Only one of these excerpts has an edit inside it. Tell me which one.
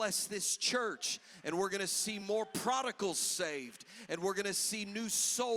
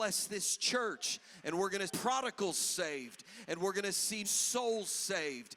second; 2 cuts; at 1.9 s, 4.2 s

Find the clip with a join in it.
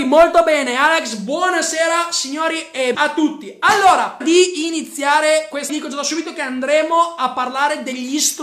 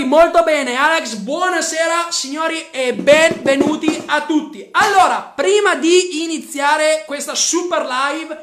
first; 3 cuts; at 2.9 s, 4.2 s, 5.7 s

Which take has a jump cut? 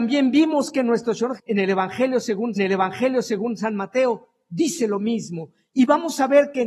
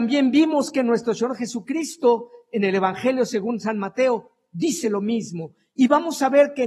first; 2 cuts; at 1.4 s, 2.6 s

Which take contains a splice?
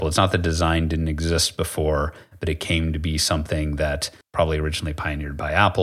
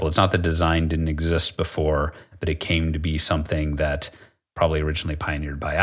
first; 1 cut; at 4.2 s

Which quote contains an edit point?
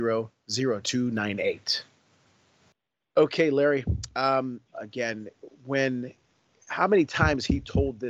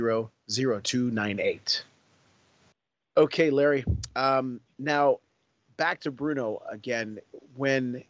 first; 1 cut; at 4.7 s

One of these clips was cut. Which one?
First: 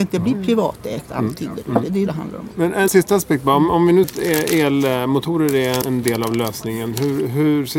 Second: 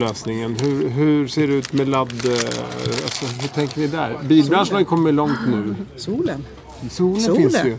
first; 4 cuts; at 2.1 s, 2.9 s, 4.0 s, 5.8 s

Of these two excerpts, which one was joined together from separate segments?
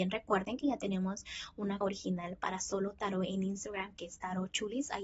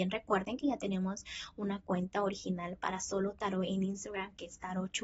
first; 1 cut; at 1.8 s

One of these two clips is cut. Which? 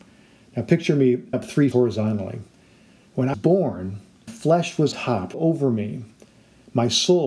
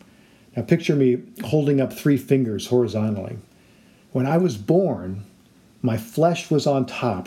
first; 6 cuts; at 1.3 s, 1.7 s, 3.3 s, 4.3 s, 4.9 s, 5.3 s

